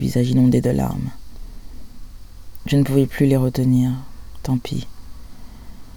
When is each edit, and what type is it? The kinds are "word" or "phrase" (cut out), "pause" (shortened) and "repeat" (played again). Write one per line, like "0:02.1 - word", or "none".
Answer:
none